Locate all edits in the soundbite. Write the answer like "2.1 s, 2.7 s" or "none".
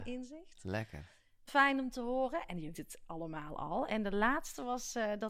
1.5 s, 2.7 s